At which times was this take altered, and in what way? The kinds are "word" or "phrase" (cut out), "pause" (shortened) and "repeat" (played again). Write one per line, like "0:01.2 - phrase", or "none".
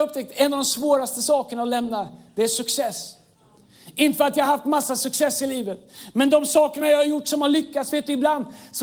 none